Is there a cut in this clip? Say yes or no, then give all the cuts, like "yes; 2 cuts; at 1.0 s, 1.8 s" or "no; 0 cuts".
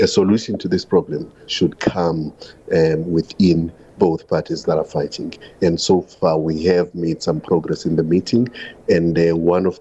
no; 0 cuts